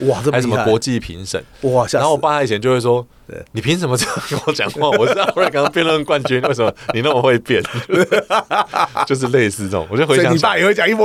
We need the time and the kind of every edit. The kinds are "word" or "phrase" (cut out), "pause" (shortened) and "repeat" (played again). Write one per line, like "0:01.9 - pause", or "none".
none

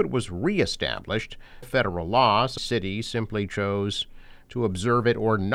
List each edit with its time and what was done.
0:01.6 - phrase
0:02.6 - word

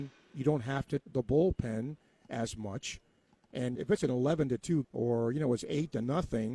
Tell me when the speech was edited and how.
0:01.0 - word
0:03.8 - word
0:04.8 - word

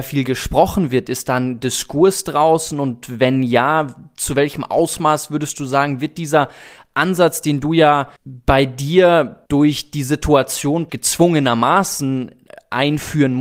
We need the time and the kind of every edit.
0:08.2 - pause
0:09.5 - pause
0:10.9 - word

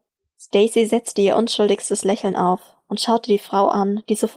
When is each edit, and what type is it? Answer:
none

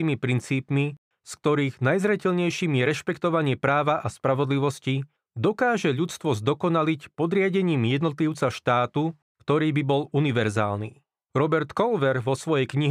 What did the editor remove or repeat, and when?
none

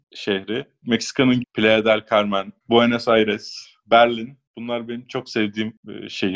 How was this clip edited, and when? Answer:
0:01.4 - word
0:02.6 - word

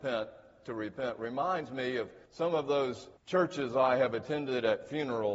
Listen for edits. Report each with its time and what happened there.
0:02.3 - pause
0:03.2 - pause

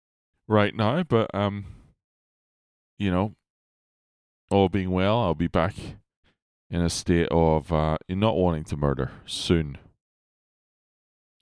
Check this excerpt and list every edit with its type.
none

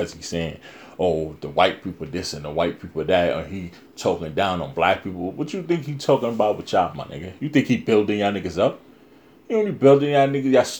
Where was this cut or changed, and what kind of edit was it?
none

